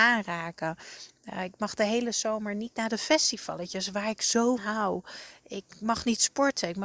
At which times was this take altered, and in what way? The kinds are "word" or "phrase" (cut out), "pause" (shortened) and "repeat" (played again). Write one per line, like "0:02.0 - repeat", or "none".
0:04.6 - word